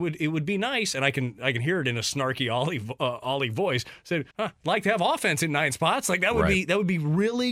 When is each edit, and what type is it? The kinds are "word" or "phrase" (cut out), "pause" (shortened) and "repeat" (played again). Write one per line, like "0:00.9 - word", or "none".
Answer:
0:04.3 - pause